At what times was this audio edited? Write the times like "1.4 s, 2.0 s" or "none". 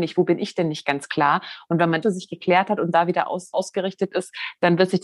2.0 s, 3.5 s